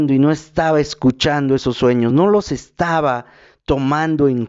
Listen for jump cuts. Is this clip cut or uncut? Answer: uncut